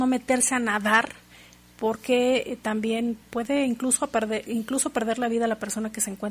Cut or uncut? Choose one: cut